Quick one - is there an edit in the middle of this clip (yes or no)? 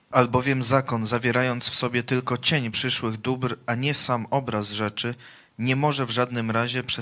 no